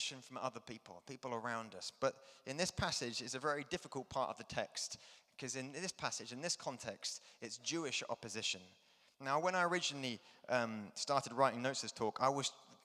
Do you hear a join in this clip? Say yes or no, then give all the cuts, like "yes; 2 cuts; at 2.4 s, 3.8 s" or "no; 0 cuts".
no; 0 cuts